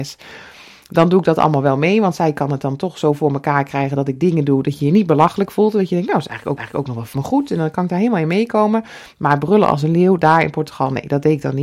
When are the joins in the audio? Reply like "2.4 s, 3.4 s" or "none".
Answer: 6.6 s, 7.1 s